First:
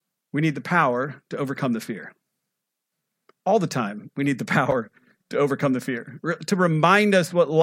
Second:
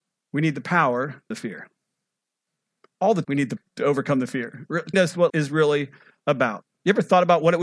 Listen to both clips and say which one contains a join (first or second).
second